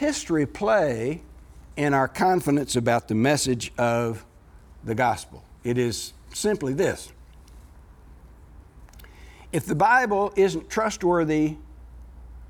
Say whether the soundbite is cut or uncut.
uncut